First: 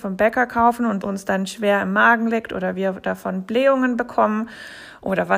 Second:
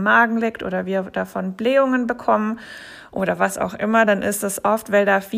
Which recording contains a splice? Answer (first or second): first